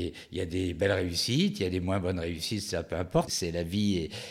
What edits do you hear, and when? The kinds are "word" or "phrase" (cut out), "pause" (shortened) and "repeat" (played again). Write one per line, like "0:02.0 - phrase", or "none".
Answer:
0:03.3 - word